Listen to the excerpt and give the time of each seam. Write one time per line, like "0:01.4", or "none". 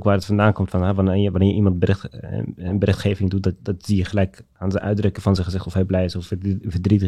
none